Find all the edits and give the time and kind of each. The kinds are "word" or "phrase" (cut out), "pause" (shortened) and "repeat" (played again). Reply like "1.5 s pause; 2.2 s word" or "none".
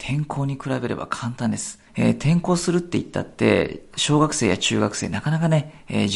1.9 s pause